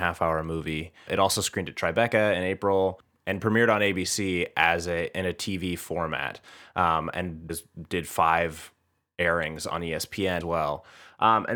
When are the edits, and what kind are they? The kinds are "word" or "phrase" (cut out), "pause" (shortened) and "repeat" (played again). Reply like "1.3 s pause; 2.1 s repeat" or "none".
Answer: 1.1 s word; 7.5 s word; 10.4 s word

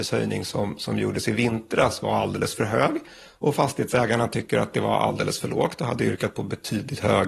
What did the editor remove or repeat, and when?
none

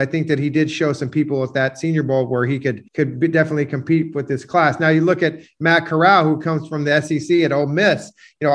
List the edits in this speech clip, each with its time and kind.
2.9 s pause

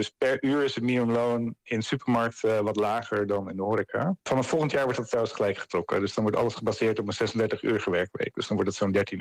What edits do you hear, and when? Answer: none

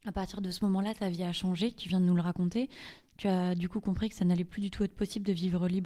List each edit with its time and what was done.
none

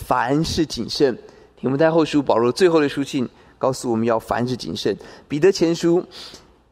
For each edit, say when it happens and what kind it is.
none

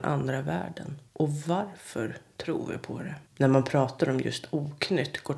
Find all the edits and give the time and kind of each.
1.1 s pause; 3.3 s pause

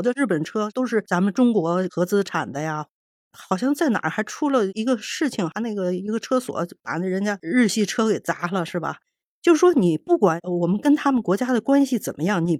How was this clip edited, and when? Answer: none

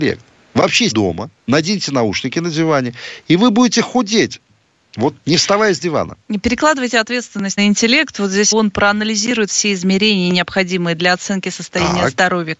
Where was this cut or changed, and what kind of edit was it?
0.9 s word; 1.4 s pause; 5.2 s word; 6.2 s pause; 7.6 s phrase; 8.5 s phrase

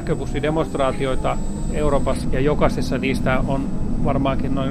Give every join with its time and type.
2.2 s phrase; 3.4 s word

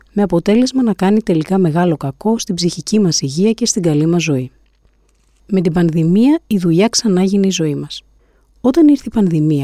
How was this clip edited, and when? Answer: none

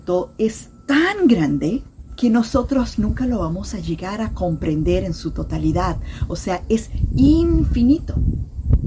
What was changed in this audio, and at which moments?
none

